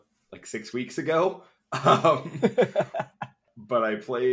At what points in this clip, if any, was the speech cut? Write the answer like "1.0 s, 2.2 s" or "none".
none